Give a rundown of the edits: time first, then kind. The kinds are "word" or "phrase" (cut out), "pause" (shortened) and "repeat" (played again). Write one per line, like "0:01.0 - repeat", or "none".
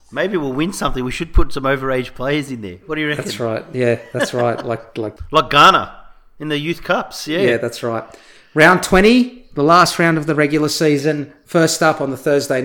none